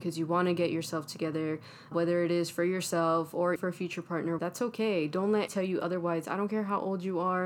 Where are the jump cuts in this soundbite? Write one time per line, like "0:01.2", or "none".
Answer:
0:01.9
0:03.6
0:04.4
0:05.5